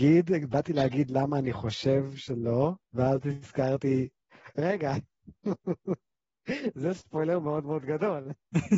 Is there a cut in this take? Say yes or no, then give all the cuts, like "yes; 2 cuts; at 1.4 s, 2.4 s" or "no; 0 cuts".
yes; 1 cut; at 2.8 s